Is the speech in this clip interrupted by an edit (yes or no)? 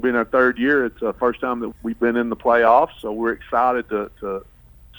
yes